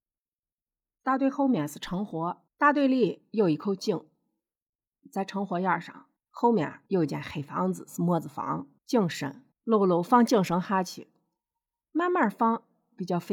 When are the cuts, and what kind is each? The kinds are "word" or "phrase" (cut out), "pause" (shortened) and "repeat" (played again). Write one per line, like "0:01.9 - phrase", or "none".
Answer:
0:02.5 - pause
0:06.2 - pause
0:06.9 - pause
0:08.8 - pause
0:09.5 - pause